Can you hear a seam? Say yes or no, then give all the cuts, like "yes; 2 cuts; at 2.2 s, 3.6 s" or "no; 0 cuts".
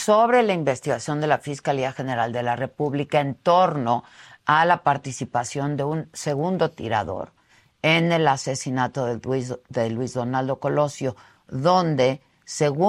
no; 0 cuts